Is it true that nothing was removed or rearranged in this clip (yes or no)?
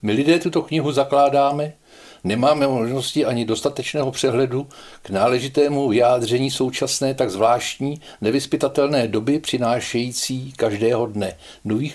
yes